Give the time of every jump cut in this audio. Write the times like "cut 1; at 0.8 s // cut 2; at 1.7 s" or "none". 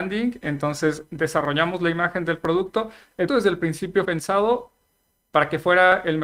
cut 1; at 3.3 s // cut 2; at 4.1 s